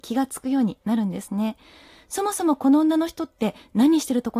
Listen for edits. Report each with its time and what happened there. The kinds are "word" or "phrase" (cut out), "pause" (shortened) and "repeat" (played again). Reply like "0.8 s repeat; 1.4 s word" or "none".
none